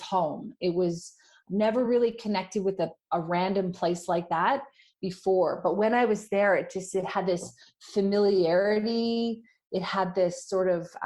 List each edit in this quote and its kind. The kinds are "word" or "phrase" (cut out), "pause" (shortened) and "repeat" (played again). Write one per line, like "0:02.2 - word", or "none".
none